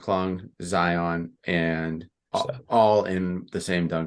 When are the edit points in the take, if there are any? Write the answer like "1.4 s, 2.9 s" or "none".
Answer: 2.3 s